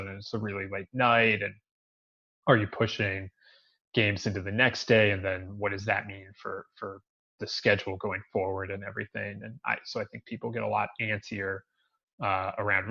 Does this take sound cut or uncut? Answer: uncut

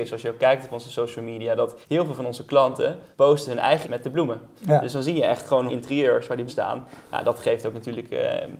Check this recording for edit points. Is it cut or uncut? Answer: cut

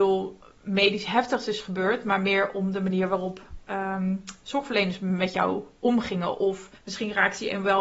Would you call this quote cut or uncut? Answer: cut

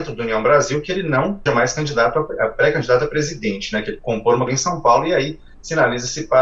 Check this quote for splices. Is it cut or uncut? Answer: cut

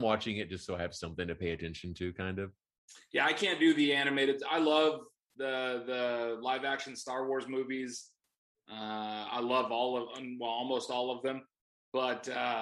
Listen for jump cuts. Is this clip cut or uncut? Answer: uncut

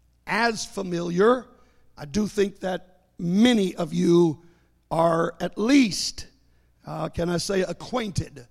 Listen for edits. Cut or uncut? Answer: uncut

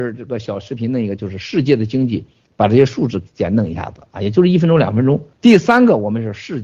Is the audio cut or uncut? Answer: uncut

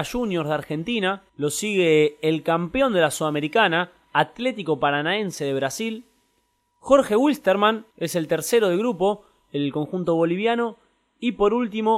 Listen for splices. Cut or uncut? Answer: cut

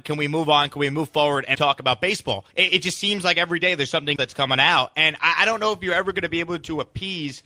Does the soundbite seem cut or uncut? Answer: cut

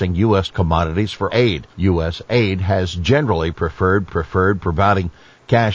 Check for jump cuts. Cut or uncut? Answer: cut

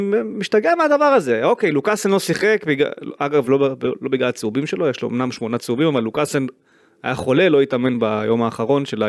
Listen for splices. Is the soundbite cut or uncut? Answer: uncut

